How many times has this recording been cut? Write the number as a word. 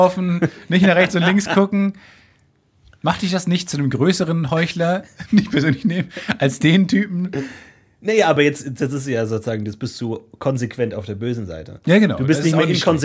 zero